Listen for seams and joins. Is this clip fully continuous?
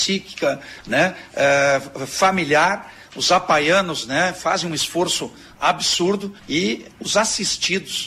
no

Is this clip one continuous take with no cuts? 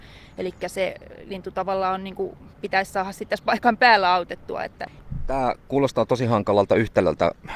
no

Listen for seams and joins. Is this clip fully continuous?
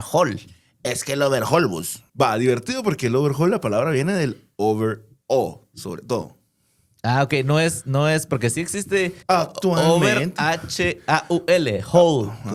no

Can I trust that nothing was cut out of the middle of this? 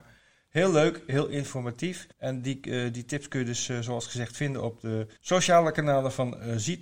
no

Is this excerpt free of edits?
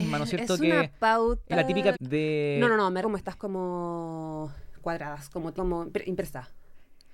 no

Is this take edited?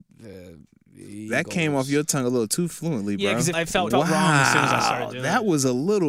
yes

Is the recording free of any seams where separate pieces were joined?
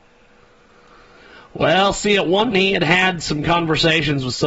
no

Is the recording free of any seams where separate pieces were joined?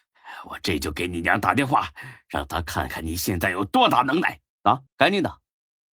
no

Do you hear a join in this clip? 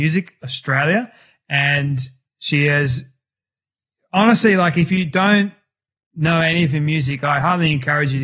no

